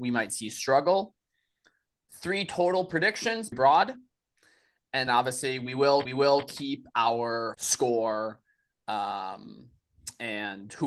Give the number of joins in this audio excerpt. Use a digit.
4